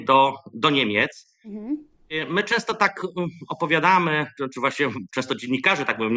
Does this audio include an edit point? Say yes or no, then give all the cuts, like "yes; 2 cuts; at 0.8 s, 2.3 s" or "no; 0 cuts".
no; 0 cuts